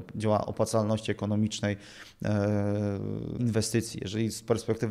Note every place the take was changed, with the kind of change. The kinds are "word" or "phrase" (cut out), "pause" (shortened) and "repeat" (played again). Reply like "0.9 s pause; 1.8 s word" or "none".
3.4 s word